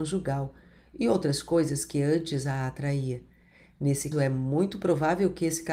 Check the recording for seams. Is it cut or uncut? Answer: cut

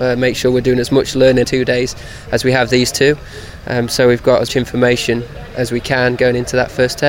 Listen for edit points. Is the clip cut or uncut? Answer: cut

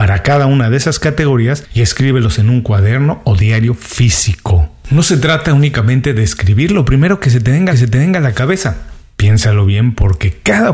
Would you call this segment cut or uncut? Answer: cut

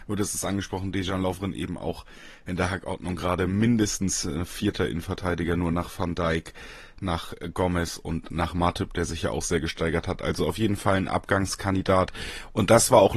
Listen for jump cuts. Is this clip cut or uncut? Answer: uncut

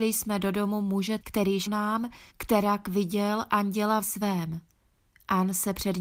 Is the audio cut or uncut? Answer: cut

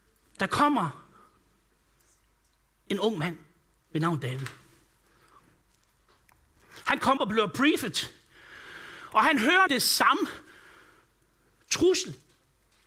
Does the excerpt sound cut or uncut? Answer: cut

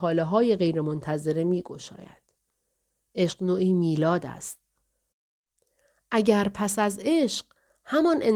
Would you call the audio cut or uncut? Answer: uncut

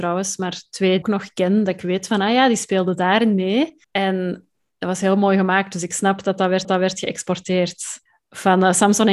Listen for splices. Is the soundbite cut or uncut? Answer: cut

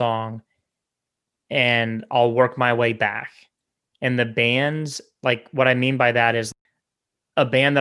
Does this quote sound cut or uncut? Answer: uncut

